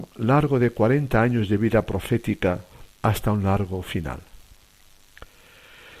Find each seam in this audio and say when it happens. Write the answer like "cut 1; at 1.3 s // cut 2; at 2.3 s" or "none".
cut 1; at 2.9 s